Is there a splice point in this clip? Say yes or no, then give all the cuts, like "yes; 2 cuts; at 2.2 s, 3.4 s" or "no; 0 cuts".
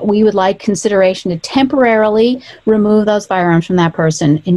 no; 0 cuts